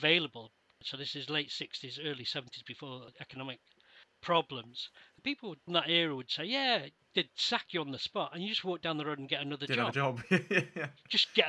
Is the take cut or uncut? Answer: cut